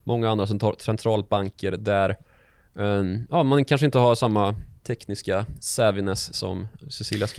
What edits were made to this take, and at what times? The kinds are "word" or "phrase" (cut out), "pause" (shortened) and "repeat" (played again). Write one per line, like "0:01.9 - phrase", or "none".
0:04.8 - pause

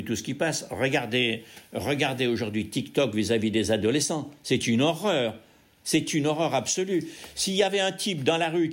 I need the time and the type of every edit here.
none

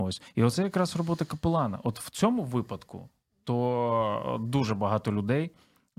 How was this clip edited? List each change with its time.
none

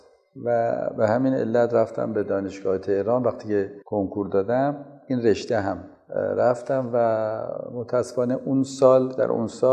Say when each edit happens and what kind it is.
0:03.8 - pause

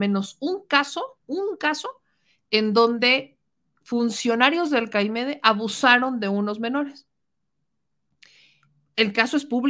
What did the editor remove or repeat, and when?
0:01.2 - pause

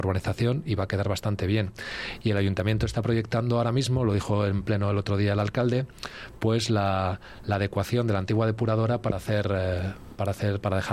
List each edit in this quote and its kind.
none

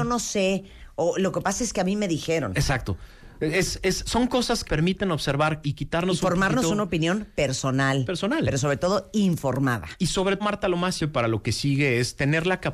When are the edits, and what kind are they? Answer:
0:04.6 - phrase
0:05.6 - word
0:10.4 - word
0:11.0 - word

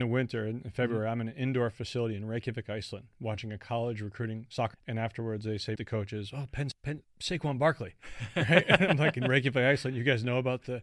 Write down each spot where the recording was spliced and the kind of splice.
0:04.7 - word
0:05.7 - word
0:06.7 - word
0:07.0 - word

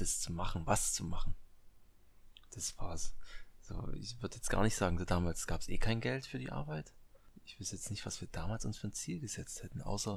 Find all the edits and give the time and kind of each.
none

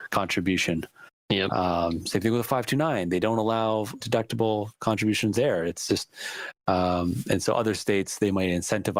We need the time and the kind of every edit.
0:04.0 - word
0:05.3 - word
0:05.9 - word

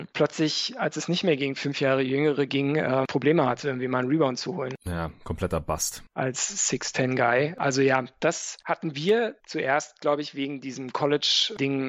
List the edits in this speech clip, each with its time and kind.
none

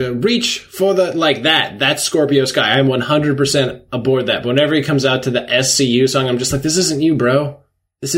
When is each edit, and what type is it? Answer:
none

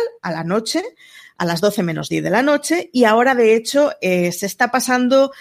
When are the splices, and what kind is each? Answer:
none

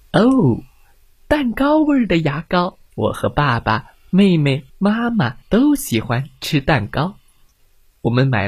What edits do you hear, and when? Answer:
0:02.9 - pause
0:04.7 - pause
0:05.4 - pause

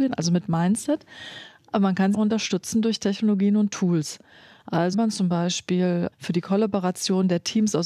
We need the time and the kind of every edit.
0:02.1 - word
0:04.9 - word
0:06.1 - word

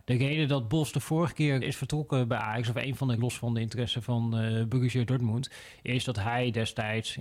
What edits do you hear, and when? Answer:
0:01.6 - word
0:03.2 - word

